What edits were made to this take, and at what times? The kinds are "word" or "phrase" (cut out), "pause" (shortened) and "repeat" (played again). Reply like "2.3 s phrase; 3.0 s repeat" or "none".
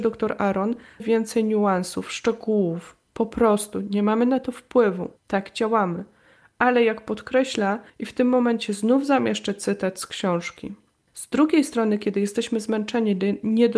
1.0 s word; 5.2 s pause; 7.9 s pause